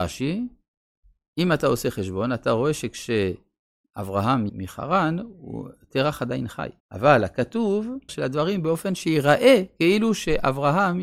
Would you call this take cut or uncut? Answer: cut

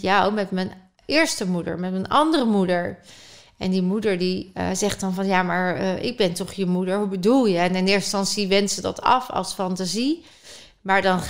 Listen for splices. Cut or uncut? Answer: uncut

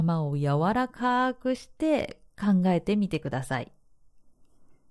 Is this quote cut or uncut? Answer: uncut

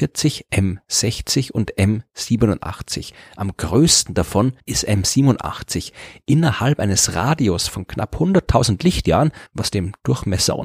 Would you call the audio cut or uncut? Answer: cut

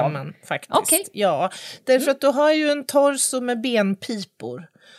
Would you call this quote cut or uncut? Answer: uncut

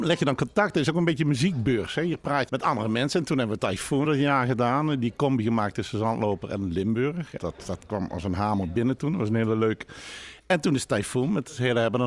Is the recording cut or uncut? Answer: cut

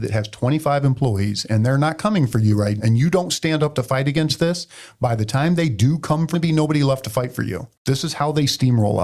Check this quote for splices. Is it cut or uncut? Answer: cut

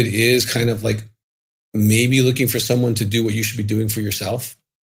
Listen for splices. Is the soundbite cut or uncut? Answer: uncut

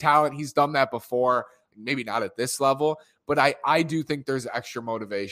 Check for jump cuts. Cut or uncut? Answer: uncut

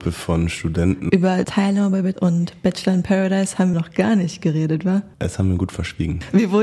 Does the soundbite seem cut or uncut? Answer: cut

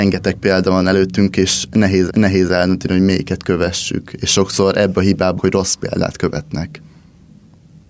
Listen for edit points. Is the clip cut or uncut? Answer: cut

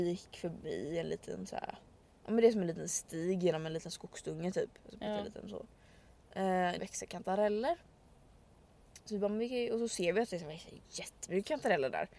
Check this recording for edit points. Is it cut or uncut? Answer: cut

